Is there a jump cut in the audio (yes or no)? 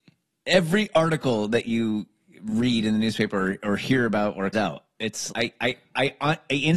yes